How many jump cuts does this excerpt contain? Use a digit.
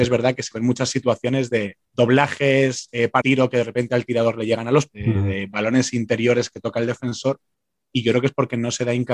3